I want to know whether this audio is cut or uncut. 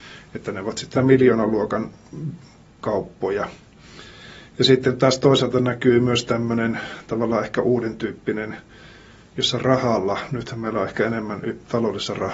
cut